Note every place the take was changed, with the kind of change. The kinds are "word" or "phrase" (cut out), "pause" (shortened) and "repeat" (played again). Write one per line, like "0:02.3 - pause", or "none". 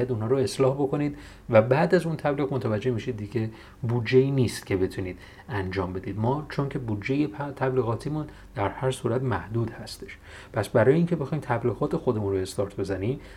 none